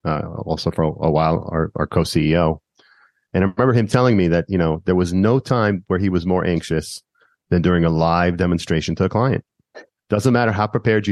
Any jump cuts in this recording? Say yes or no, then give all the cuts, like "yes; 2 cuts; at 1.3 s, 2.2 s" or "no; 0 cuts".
no; 0 cuts